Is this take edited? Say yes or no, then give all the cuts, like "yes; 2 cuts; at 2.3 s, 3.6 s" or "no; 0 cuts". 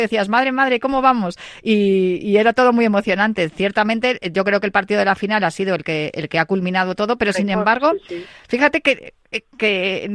no; 0 cuts